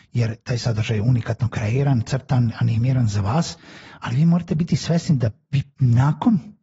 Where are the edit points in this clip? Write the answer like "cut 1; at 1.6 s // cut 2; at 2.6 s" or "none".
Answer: none